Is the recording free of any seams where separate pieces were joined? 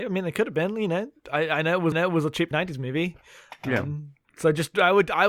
no; 3 cuts; at 1.9 s, 2.5 s, 4.2 s

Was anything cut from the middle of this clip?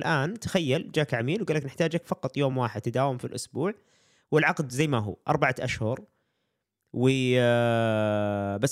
no; 0 cuts

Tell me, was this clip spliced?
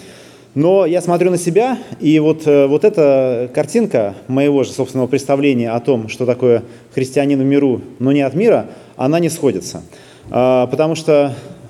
no; 0 cuts

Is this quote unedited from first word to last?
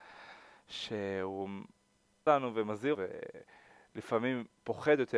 no; 2 cuts; at 2.3 s, 2.9 s

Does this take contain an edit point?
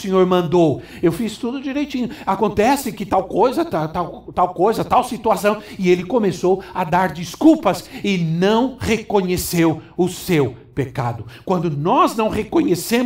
no; 0 cuts

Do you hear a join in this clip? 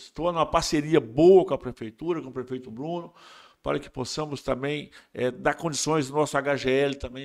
no; 0 cuts

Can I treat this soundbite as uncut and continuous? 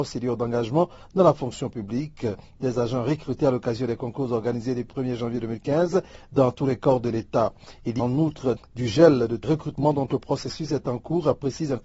no; 4 cuts; at 4.9 s, 8.0 s, 8.6 s, 9.4 s

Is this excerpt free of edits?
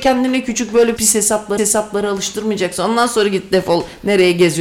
no; 2 cuts; at 1.0 s, 1.6 s

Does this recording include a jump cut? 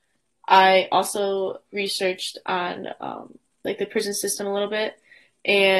yes; 2 cuts; at 1.7 s, 3.4 s

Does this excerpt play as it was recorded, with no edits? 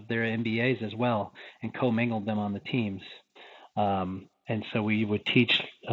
yes; 0 cuts

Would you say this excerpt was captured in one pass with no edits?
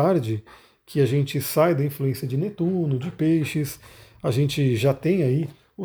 yes; 0 cuts

